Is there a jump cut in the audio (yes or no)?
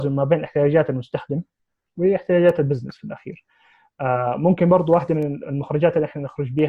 no